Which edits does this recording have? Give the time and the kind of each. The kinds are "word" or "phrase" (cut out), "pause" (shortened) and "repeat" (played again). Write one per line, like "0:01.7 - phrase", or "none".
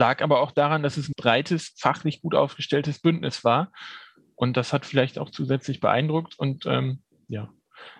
0:01.1 - word

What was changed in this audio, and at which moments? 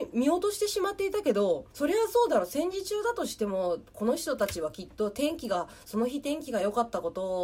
0:01.7 - pause

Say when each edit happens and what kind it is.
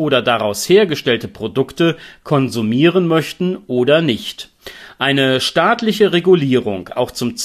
none

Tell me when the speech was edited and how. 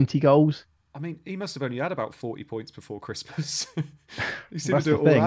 none

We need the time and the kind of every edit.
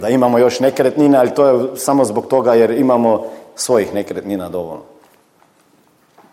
none

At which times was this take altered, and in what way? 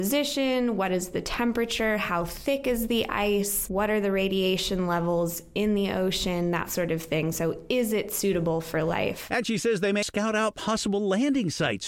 0:10.0 - word

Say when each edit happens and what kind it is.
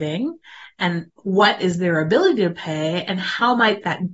0:01.1 - pause

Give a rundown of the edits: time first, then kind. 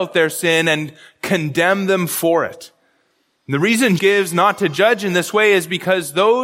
0:04.0 - word

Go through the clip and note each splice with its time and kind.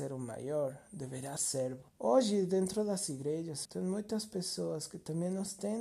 0:01.4 - word
0:01.9 - pause
0:03.6 - word

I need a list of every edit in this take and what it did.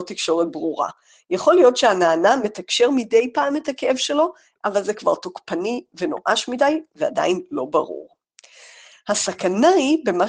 none

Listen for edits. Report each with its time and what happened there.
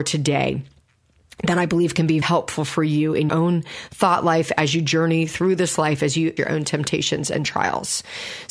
0:02.2 - word
0:03.3 - word
0:06.4 - word

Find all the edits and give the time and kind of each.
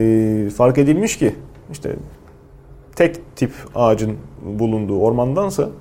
none

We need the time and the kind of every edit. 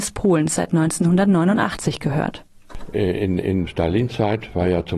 0:03.7 - word

